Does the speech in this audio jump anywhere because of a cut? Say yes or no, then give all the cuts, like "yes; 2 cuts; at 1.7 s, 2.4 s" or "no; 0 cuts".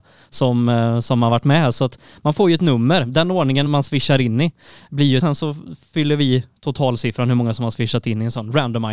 yes; 2 cuts; at 3.7 s, 5.2 s